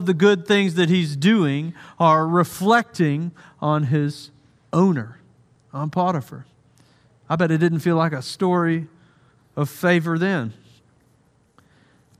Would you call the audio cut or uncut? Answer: uncut